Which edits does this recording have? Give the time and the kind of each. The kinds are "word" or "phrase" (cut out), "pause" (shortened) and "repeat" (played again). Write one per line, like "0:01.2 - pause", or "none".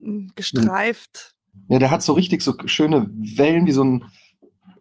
none